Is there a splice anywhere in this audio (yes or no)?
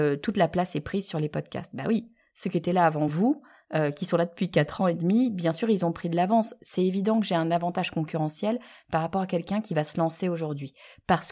no